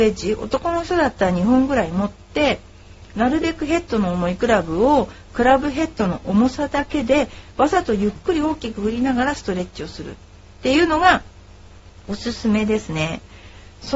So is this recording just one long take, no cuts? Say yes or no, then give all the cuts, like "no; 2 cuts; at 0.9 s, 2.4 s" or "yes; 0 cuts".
yes; 0 cuts